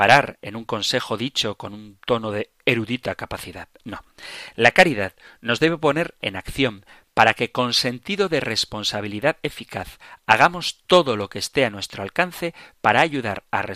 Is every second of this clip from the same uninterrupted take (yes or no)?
yes